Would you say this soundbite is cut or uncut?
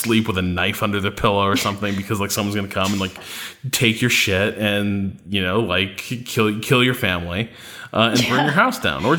uncut